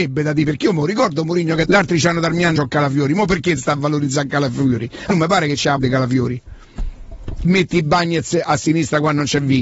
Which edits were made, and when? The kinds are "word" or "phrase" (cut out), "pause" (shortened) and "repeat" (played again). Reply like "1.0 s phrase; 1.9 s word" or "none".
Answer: 1.7 s word; 2.6 s word; 3.6 s word; 5.1 s word; 5.8 s word; 7.4 s word